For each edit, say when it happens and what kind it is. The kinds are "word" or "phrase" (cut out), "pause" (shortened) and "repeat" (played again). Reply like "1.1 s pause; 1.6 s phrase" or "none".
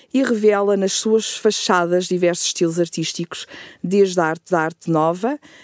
4.5 s repeat